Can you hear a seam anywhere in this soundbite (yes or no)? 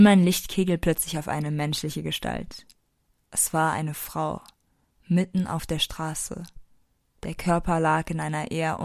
no